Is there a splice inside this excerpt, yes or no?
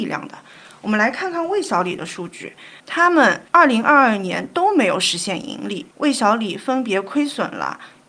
yes